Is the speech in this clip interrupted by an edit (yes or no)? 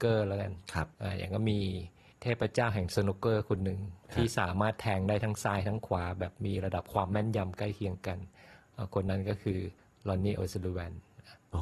yes